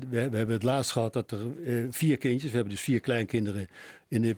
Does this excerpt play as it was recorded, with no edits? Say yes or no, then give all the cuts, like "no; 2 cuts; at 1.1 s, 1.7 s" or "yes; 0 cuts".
yes; 0 cuts